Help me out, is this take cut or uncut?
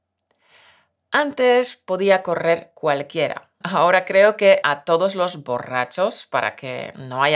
cut